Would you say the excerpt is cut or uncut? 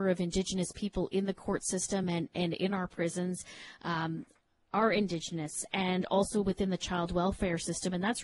uncut